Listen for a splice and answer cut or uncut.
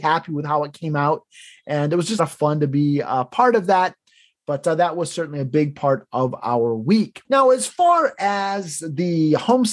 cut